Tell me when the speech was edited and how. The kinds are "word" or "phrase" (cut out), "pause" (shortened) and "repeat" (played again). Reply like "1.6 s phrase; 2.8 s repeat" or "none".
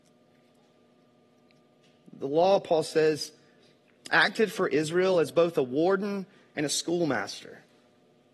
none